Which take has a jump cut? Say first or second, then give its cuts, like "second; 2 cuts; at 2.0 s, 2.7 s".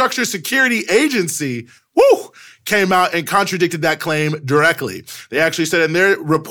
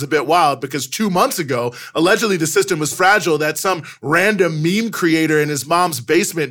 second; 1 cut; at 2.9 s